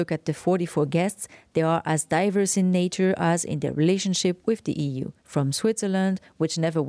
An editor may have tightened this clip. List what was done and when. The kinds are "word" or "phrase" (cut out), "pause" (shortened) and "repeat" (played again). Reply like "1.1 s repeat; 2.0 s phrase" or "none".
5.2 s pause